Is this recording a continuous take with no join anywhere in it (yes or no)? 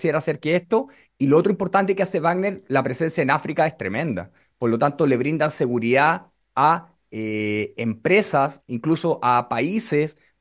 yes